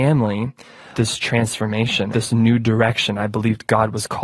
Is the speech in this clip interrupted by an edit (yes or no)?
yes